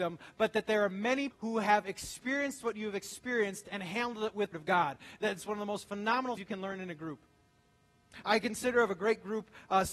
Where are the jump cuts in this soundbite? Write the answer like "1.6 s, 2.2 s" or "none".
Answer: 1.3 s, 4.5 s, 6.4 s